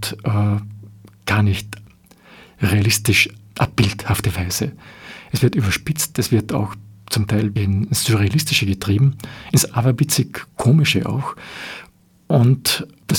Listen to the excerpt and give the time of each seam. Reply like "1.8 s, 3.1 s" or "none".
7.6 s

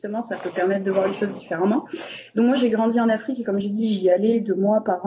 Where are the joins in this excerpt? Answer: none

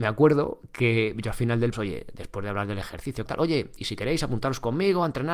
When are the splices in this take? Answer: 1.7 s, 3.3 s

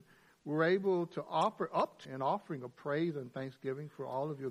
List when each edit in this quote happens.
2.0 s

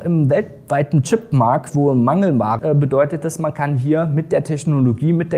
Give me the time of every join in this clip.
2.6 s

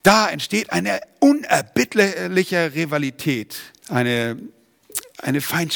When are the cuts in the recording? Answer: 3.8 s

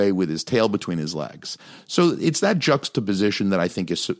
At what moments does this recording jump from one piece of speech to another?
none

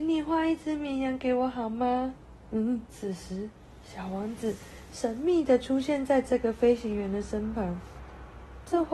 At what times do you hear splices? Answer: 2.9 s

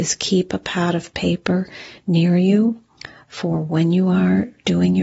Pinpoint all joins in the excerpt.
none

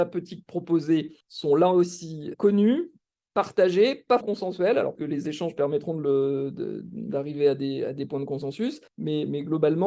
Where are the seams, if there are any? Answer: 1.2 s, 2.3 s, 4.2 s, 4.9 s, 8.9 s

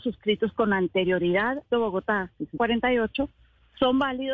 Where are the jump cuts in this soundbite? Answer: 1.7 s, 2.6 s

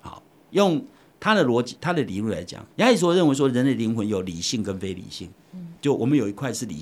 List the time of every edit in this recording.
2.7 s, 5.8 s

